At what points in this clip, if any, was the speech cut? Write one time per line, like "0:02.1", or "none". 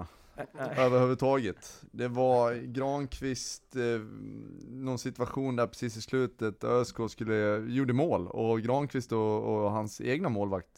none